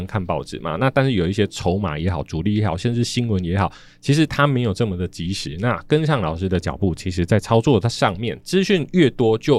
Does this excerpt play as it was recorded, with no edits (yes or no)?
yes